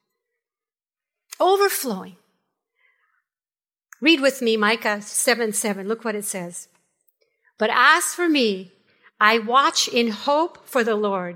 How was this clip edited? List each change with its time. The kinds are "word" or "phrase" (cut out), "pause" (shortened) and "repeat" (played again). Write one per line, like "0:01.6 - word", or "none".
none